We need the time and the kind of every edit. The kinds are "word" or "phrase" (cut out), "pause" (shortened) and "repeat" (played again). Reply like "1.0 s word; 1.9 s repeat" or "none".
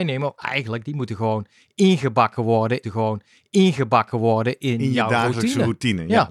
2.8 s repeat